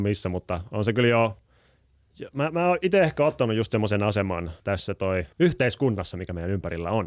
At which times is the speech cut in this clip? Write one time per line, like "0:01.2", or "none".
0:04.6
0:05.3